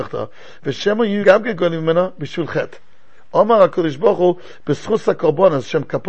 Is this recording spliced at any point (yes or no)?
yes